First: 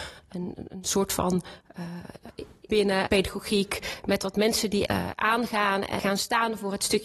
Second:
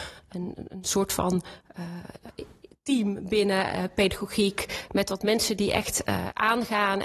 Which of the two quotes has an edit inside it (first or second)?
first